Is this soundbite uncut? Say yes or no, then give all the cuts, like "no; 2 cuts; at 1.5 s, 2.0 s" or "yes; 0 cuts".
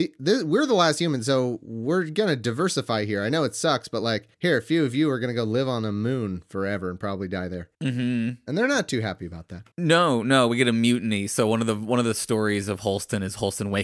no; 3 cuts; at 4.3 s, 7.7 s, 9.7 s